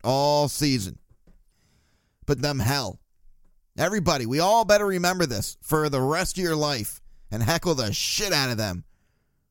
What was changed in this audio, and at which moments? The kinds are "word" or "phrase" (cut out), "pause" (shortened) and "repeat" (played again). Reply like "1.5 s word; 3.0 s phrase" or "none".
2.4 s phrase